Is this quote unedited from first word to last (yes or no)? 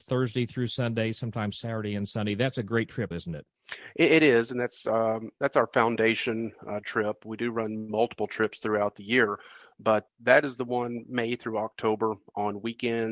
no